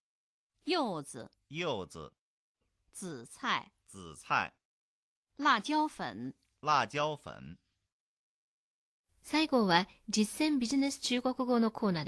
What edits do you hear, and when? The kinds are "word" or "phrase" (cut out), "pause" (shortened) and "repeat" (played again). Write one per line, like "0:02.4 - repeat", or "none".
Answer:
none